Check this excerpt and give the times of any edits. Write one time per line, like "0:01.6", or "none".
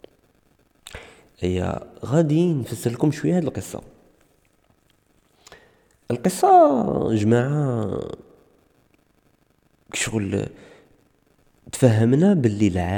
none